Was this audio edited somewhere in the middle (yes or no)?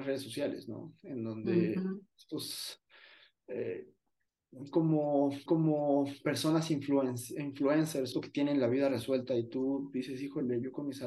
yes